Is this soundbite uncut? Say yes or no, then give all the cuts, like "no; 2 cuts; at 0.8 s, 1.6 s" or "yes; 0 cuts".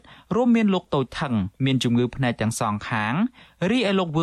no; 1 cut; at 1.5 s